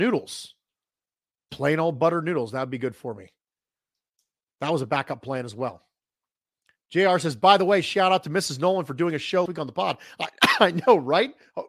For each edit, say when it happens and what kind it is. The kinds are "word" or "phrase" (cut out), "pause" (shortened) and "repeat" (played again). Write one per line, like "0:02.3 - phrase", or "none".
0:01.5 - word
0:09.5 - word